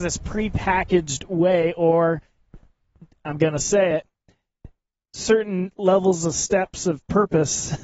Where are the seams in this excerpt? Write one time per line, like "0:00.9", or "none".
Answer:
none